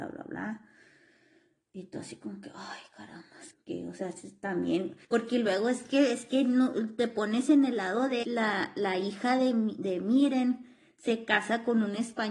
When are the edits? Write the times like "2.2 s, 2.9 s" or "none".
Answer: 3.5 s, 5.0 s, 8.2 s